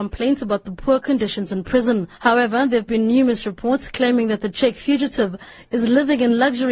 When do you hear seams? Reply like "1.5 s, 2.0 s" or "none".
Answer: 2.1 s